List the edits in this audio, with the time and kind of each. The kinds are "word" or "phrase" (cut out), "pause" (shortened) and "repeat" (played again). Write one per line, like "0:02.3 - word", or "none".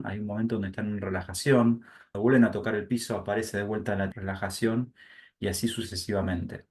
0:02.1 - word
0:04.1 - word